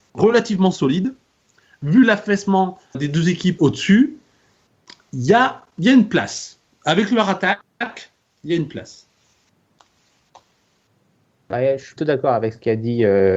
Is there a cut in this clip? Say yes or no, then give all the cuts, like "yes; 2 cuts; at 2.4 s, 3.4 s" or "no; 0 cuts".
yes; 3 cuts; at 2.9 s, 3.6 s, 12.0 s